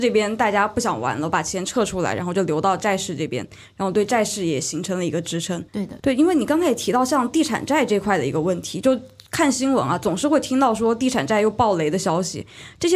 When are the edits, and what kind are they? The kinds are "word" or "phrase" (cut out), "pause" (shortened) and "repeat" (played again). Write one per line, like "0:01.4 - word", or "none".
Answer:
0:05.7 - pause
0:06.0 - phrase